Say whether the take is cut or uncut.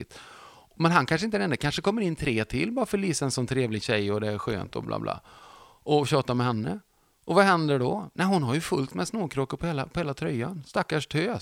cut